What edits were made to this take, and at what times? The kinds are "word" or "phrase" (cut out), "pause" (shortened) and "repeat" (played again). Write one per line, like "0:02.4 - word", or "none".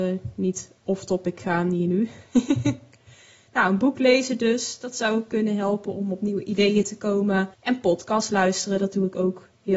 0:07.5 - pause